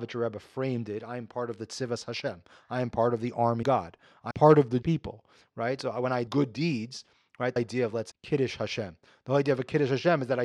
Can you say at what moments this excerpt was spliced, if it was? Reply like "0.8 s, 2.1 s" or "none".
3.6 s, 4.3 s, 4.8 s, 6.3 s, 7.6 s, 8.1 s